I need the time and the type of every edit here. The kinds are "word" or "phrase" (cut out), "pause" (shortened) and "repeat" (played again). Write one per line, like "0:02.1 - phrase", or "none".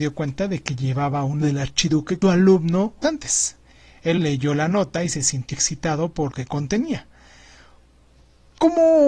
0:01.4 - word
0:02.2 - phrase
0:03.0 - phrase
0:04.2 - word
0:05.5 - word
0:06.3 - word